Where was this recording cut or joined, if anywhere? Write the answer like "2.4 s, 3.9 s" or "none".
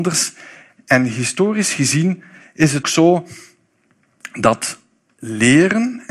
2.8 s